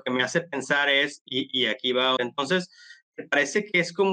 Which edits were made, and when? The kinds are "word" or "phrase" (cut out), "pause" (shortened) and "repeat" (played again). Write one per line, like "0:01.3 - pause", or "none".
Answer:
0:02.2 - phrase

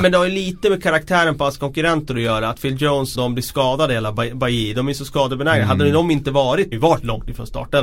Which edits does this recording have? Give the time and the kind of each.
0:03.1 - word
0:06.7 - phrase

